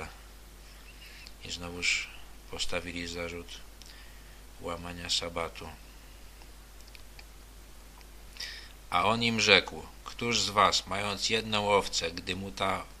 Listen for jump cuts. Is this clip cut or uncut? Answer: uncut